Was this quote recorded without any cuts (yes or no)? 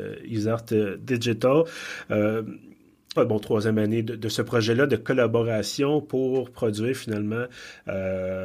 no